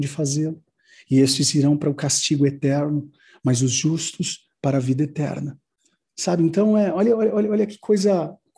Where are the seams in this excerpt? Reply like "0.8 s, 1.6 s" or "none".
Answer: none